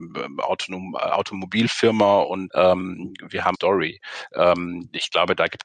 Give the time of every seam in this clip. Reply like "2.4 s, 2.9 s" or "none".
2.5 s, 3.5 s